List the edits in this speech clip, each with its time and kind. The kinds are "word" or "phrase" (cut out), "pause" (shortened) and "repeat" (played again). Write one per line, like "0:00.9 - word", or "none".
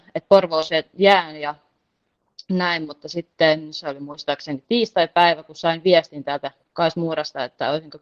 none